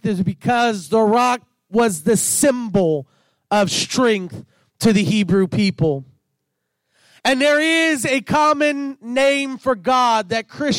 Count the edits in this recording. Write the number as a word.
zero